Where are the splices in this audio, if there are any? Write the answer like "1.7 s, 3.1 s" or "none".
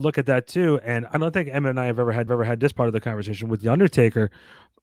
1.1 s, 2.3 s

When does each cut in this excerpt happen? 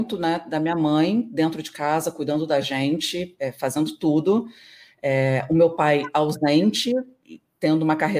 none

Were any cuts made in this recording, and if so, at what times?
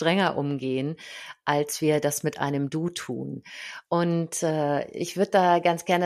3.9 s

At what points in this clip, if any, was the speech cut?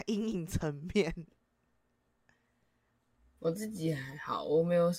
none

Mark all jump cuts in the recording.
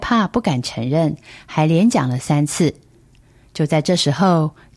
none

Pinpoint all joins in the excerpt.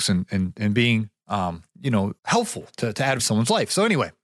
1.7 s, 2.2 s, 3.2 s

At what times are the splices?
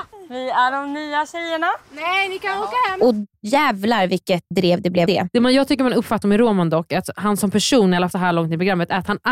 1.8 s, 4.5 s, 5.1 s, 6.2 s, 8.1 s

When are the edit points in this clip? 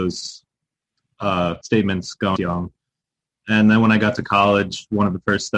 1.6 s, 2.4 s

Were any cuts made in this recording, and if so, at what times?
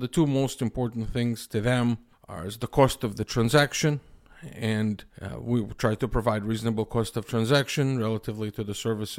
2.1 s, 5.1 s

